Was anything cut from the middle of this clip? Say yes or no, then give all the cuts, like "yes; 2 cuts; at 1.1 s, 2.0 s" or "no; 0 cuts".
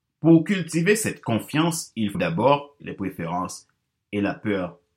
yes; 2 cuts; at 2.1 s, 2.8 s